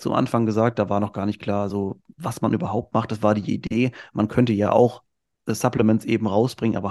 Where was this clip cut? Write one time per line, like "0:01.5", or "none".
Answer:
none